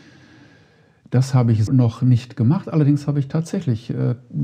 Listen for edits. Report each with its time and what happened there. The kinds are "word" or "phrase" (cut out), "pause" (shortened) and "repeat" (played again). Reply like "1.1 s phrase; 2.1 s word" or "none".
1.7 s word